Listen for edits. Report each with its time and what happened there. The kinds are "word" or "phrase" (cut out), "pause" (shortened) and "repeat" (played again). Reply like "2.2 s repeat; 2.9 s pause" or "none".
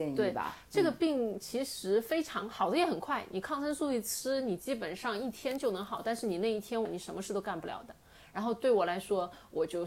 6.8 s phrase